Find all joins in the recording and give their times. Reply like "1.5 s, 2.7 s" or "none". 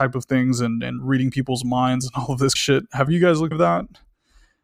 2.6 s, 3.1 s, 3.5 s

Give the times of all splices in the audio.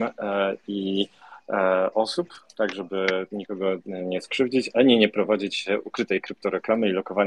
none

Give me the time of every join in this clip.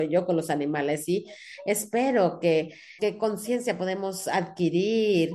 3.0 s

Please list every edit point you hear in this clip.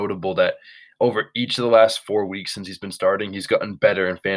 none

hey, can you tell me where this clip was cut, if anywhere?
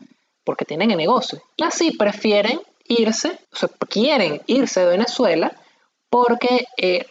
1.6 s, 3.4 s

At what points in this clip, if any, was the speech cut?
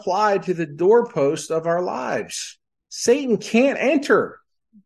none

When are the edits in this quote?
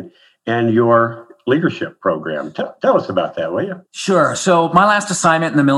3.9 s

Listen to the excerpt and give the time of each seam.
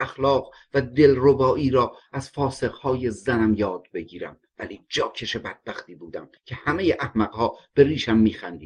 4.5 s, 6.4 s

